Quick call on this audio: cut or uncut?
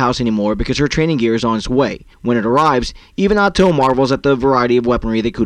cut